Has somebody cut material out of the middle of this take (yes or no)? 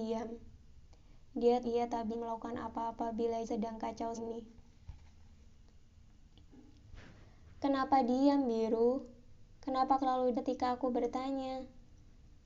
yes